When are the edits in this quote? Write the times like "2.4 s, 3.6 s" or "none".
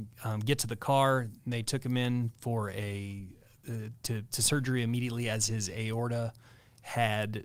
none